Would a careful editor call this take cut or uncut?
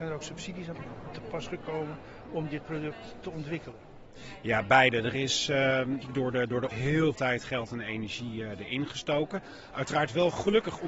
cut